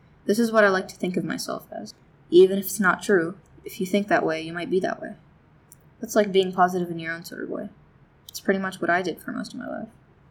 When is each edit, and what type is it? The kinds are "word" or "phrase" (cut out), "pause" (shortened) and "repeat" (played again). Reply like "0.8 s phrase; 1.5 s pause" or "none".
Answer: none